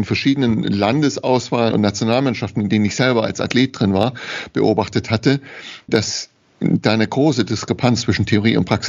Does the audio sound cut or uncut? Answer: cut